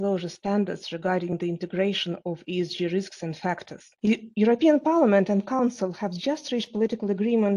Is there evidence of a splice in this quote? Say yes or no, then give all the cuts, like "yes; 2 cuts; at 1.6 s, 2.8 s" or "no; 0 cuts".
yes; 1 cut; at 4.0 s